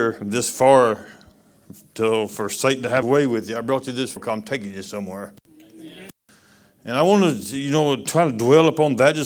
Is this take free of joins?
no; 2 cuts; at 3.0 s, 4.2 s

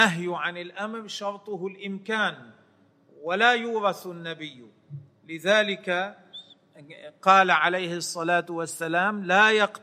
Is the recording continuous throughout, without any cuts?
yes; 0 cuts

